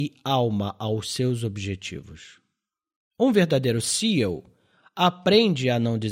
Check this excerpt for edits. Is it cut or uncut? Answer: uncut